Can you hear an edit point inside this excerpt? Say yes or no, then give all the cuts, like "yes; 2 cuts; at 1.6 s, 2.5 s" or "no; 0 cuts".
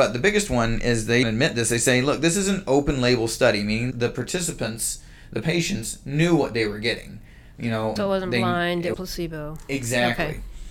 yes; 4 cuts; at 1.2 s, 3.9 s, 8.0 s, 8.9 s